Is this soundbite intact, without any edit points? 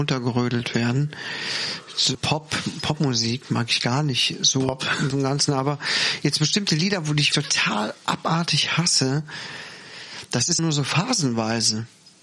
no; 4 cuts; at 2.1 s, 5.1 s, 7.3 s, 10.6 s

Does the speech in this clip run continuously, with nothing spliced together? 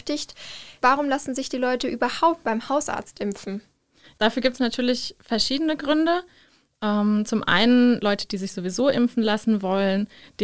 yes; 0 cuts

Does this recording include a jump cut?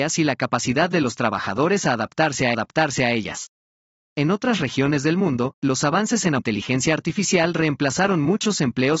yes; 2 cuts; at 2.5 s, 6.4 s

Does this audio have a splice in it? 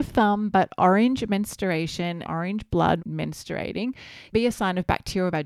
yes; 3 cuts; at 2.2 s, 3.0 s, 4.3 s

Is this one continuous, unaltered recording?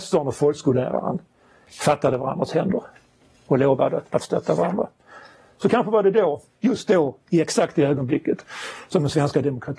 yes; 0 cuts

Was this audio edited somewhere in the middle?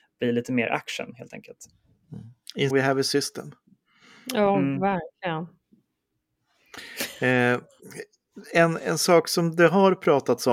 yes; 1 cut; at 2.7 s

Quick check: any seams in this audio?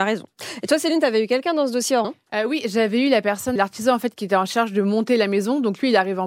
yes; 2 cuts; at 2.0 s, 3.6 s

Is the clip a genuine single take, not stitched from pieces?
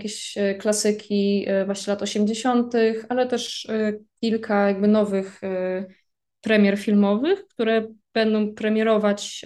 yes; 0 cuts

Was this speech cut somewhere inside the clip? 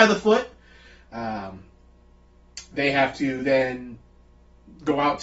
no; 0 cuts

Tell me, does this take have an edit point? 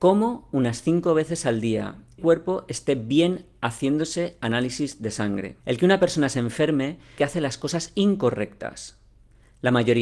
yes; 3 cuts; at 2.2 s, 5.6 s, 7.2 s

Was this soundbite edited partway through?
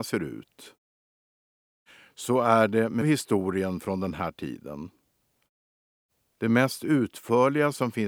yes; 1 cut; at 3.0 s

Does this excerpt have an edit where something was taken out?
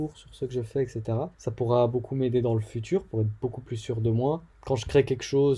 yes; 2 cuts; at 1.3 s, 4.5 s

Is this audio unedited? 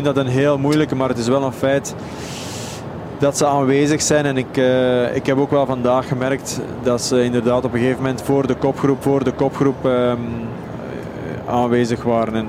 no; 1 cut; at 9.0 s

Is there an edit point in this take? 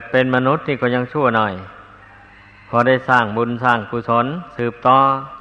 no; 0 cuts

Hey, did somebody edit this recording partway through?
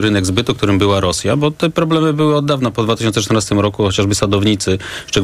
no; 0 cuts

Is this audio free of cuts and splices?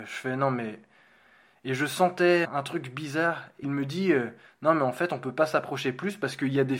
no; 2 cuts; at 2.4 s, 3.6 s

